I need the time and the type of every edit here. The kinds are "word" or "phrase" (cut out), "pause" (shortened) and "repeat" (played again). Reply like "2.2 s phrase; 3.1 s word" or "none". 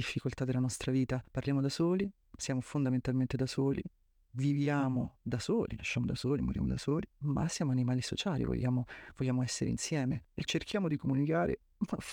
10.5 s word